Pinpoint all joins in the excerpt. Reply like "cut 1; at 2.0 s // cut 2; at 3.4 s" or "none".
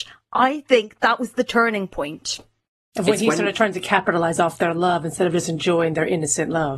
none